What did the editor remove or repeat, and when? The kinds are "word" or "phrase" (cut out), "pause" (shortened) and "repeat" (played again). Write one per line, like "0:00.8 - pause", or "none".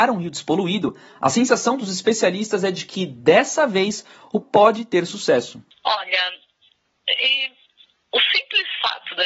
0:04.4 - word